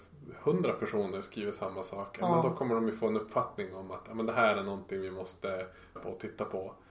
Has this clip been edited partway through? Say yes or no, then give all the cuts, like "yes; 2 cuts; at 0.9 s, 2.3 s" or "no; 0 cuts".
yes; 1 cut; at 6.0 s